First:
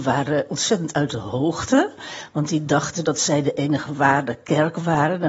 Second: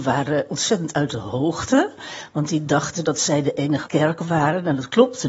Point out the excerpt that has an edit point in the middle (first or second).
second